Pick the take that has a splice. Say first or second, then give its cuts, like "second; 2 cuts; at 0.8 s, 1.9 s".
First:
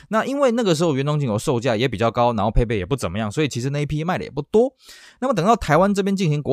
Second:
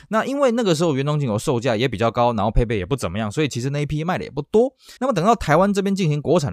second; 1 cut; at 5.0 s